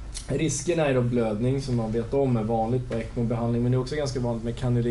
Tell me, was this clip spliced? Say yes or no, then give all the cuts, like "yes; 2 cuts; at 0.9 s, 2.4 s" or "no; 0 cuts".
no; 0 cuts